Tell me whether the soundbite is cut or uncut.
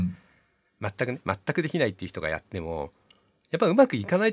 uncut